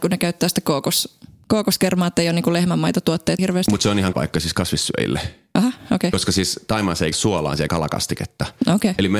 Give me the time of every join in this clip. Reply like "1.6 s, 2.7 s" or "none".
3.4 s, 4.1 s, 7.1 s, 7.7 s